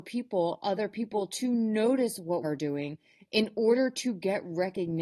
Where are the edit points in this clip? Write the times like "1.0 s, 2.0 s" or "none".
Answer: 2.4 s